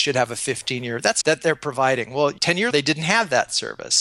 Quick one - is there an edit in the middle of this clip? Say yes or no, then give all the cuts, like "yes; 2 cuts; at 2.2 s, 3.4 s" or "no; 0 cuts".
yes; 3 cuts; at 1.2 s, 2.4 s, 2.7 s